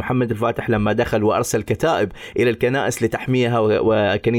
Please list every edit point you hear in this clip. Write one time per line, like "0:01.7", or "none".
none